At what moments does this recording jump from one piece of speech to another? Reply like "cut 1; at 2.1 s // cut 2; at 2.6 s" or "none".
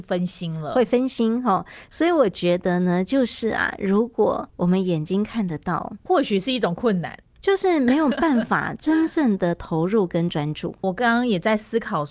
cut 1; at 4.5 s // cut 2; at 10.8 s